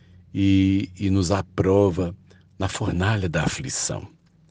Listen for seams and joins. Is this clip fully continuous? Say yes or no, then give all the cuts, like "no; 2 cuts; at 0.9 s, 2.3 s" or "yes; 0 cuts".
yes; 0 cuts